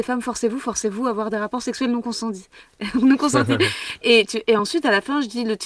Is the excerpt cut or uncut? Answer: uncut